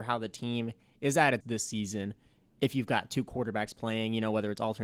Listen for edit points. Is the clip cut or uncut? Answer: cut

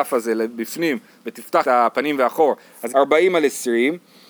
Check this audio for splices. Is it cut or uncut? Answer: cut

